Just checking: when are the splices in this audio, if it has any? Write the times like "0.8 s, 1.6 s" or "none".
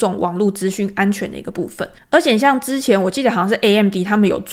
2.0 s